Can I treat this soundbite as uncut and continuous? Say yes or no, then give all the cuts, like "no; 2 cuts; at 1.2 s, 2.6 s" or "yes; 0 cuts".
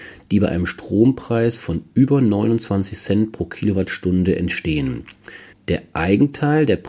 no; 1 cut; at 5.5 s